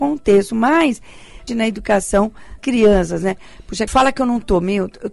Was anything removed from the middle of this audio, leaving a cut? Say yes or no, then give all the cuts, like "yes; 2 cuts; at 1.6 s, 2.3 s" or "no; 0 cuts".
yes; 3 cuts; at 1.5 s, 2.6 s, 3.9 s